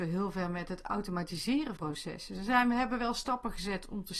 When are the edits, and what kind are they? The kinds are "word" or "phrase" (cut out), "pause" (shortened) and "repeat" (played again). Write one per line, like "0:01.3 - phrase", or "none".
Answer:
0:01.8 - word